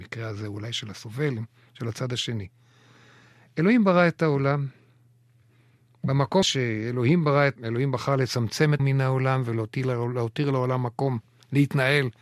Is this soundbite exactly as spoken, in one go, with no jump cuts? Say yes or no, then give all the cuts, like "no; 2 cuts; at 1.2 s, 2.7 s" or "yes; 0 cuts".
no; 3 cuts; at 6.4 s, 7.6 s, 8.8 s